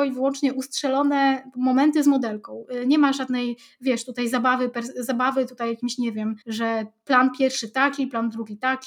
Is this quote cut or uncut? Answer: cut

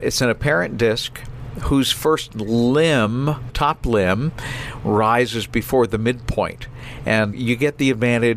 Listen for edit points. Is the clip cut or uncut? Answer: cut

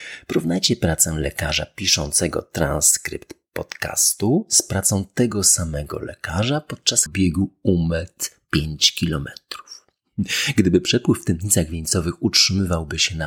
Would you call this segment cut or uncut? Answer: cut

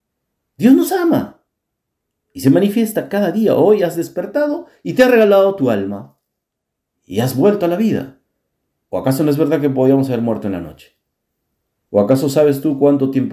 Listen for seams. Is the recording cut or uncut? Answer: uncut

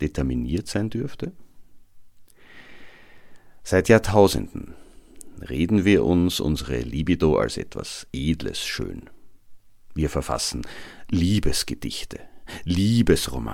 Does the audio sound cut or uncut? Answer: uncut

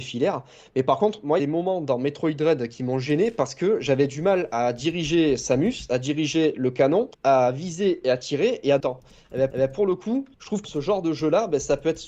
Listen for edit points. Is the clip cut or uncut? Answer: cut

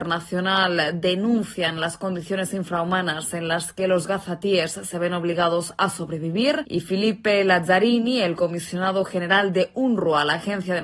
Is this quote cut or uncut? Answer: uncut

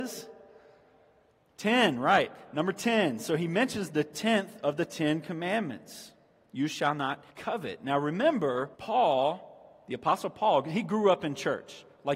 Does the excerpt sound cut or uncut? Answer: cut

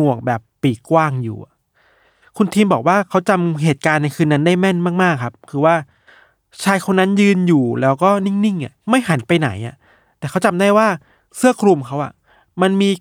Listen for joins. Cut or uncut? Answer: cut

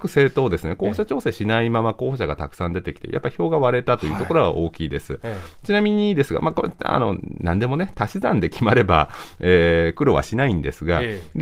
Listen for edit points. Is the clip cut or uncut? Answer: uncut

